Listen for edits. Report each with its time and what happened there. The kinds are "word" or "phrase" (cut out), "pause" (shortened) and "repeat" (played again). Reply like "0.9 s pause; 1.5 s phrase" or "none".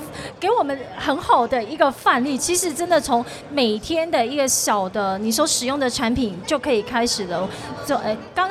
2.4 s phrase